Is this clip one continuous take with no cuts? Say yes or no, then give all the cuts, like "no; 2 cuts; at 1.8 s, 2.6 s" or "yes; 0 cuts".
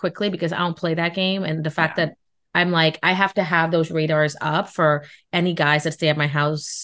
yes; 0 cuts